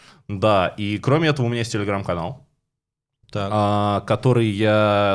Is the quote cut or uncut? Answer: uncut